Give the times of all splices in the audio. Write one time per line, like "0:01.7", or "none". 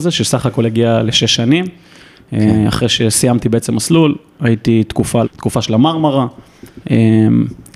0:05.2